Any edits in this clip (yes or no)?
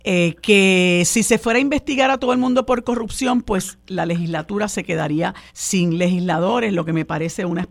yes